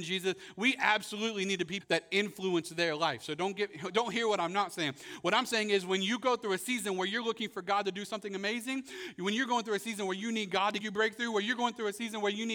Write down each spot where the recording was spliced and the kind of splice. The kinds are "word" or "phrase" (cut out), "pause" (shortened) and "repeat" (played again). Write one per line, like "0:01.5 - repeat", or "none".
0:01.8 - word
0:10.8 - word